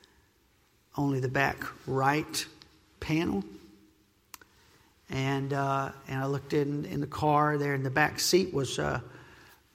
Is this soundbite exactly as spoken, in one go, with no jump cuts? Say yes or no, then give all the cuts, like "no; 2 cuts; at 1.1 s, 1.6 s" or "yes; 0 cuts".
yes; 0 cuts